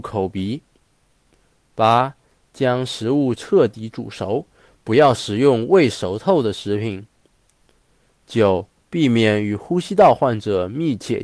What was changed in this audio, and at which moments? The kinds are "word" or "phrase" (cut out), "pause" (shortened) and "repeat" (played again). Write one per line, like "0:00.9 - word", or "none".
0:08.8 - pause